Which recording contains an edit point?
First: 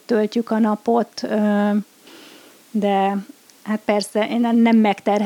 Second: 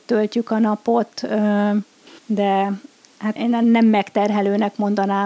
second; 2 cuts; at 2.2 s, 3.4 s

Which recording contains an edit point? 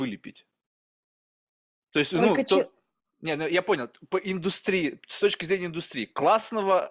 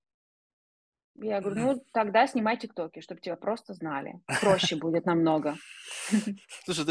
second; 1 cut; at 1.9 s

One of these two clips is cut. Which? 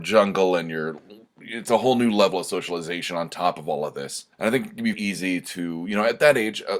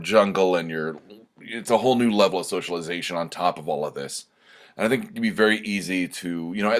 first; 2 cuts; at 4.3 s, 4.9 s

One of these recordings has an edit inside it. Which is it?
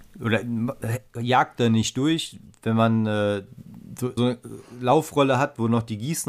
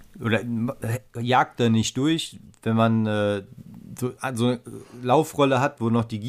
first; 1 cut; at 4.2 s

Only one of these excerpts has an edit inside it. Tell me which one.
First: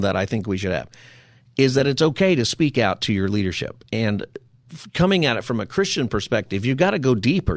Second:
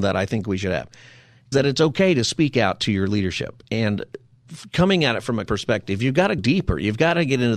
second; 3 cuts; at 1.5 s, 5.5 s, 6.4 s

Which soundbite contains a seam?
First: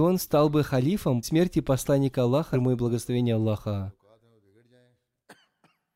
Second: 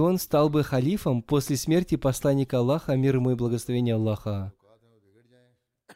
first; 2 cuts; at 1.2 s, 2.5 s

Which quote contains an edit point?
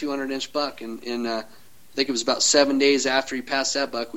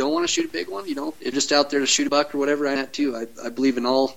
second; 3 cuts; at 1.3 s, 2.1 s, 2.8 s

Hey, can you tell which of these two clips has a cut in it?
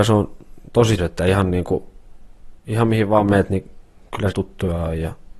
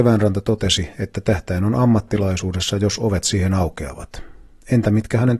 first; 3 cuts; at 1.0 s, 2.6 s, 4.3 s

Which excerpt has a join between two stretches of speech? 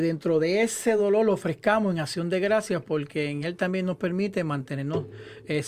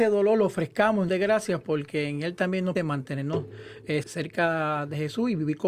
second; 3 cuts; at 1.1 s, 2.8 s, 4.0 s

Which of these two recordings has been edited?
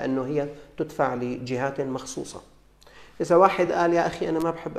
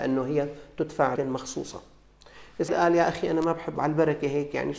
second; 3 cuts; at 1.2 s, 2.7 s, 3.8 s

